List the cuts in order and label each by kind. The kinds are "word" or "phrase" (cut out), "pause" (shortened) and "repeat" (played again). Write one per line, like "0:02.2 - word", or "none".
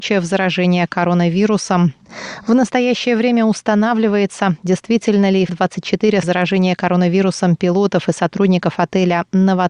0:05.5 - word
0:06.2 - word